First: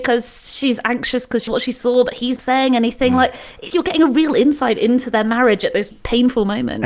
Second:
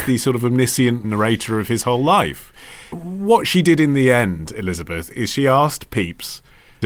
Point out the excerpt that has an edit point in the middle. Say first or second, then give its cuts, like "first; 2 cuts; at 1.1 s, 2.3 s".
first; 4 cuts; at 1.5 s, 2.4 s, 3.7 s, 5.9 s